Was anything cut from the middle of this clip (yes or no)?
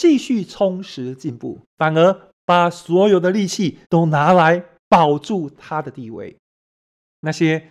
yes